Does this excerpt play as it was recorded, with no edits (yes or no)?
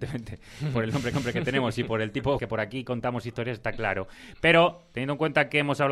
no